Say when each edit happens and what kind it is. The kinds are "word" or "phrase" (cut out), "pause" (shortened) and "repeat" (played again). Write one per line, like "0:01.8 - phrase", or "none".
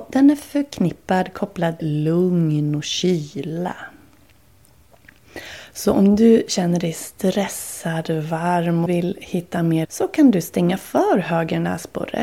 0:01.8 - word
0:08.9 - word
0:09.8 - word